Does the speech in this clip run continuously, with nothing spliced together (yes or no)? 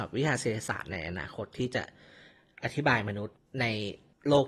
yes